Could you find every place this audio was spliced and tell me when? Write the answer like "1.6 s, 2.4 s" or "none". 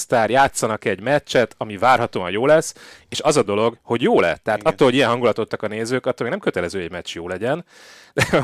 3.5 s, 5.5 s